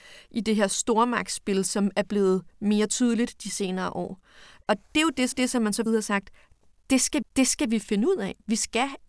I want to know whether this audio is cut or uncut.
cut